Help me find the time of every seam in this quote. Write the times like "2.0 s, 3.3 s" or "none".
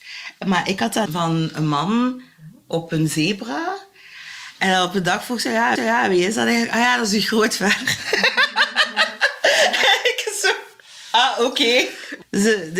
1.1 s, 5.8 s

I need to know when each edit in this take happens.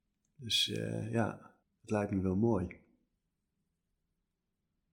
1.6 s

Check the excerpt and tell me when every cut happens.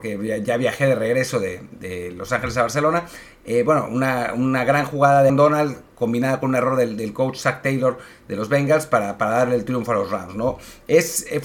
5.3 s

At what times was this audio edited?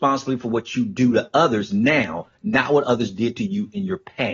none

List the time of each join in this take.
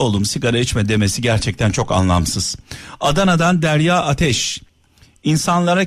none

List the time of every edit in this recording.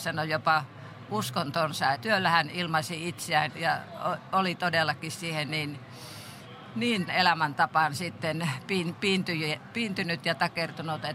1.9 s, 3.5 s, 7.1 s

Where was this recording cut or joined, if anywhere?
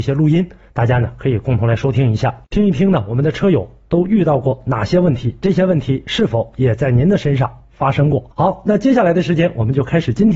2.4 s, 8.3 s

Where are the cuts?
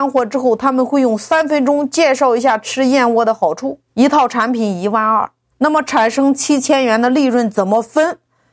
3.9 s, 5.5 s

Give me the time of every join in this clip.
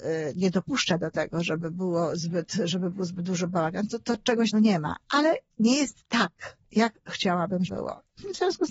4.5 s, 7.7 s

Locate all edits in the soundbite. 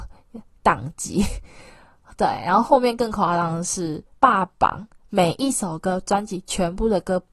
4.1 s

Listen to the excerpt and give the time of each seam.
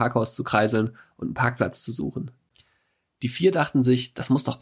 none

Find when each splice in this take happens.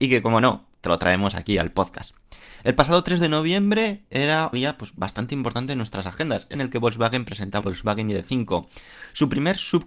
4.5 s, 6.5 s, 7.6 s

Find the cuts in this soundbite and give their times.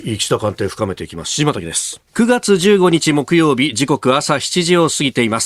2.1 s

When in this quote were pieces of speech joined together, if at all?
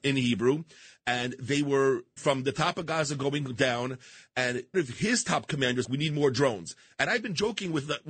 2.2 s, 4.7 s, 5.8 s

